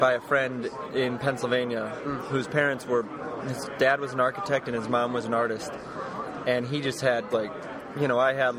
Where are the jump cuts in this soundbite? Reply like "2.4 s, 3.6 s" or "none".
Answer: 7.3 s